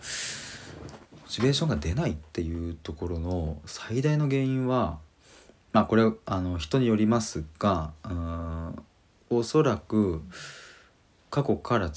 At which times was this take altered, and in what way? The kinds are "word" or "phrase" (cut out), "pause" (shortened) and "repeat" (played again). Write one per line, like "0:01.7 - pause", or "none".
none